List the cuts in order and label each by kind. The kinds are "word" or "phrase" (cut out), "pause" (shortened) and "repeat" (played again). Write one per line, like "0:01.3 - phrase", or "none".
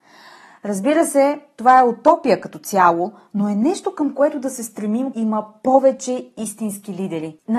0:05.1 - word